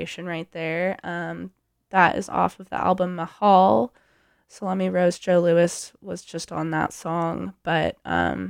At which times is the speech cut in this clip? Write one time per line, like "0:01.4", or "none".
none

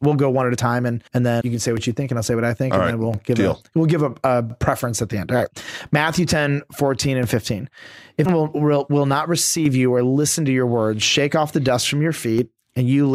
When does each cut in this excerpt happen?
0:01.1
0:01.4
0:08.3

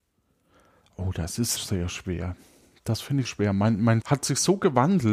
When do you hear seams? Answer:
0:01.6
0:03.3
0:04.0

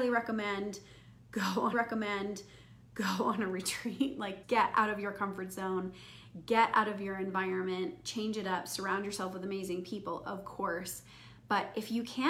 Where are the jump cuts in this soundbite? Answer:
0:01.7
0:04.4

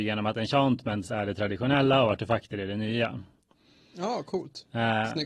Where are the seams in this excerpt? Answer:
none

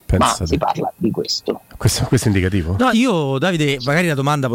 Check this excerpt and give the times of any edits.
0:02.9

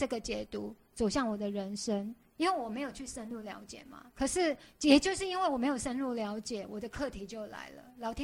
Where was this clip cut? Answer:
0:02.2
0:04.1

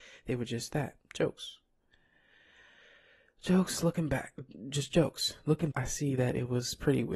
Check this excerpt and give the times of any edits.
0:01.0
0:05.7

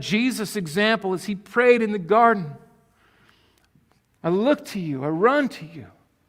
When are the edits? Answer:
0:04.2

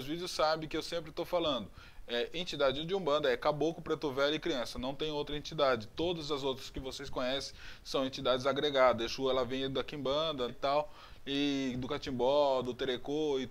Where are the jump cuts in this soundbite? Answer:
0:10.5

